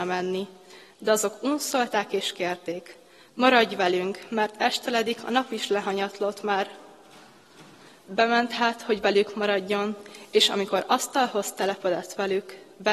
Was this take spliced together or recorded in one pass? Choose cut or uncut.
uncut